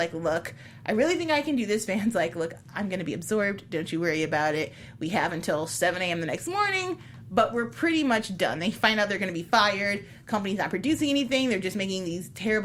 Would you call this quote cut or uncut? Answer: uncut